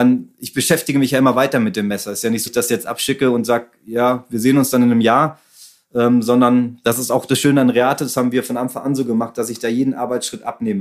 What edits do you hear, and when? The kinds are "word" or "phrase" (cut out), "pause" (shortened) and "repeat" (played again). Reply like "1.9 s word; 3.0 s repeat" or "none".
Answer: 2.5 s word